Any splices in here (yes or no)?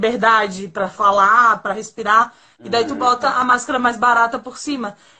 no